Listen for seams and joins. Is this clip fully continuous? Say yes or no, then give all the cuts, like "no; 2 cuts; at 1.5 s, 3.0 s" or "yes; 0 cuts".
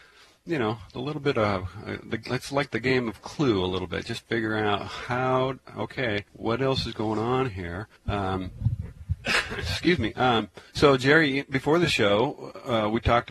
no; 3 cuts; at 6.3 s, 8.0 s, 10.7 s